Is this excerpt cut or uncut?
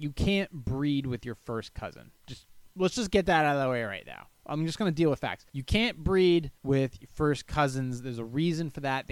cut